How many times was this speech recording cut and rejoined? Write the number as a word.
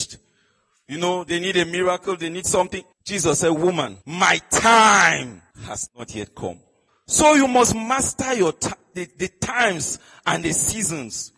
four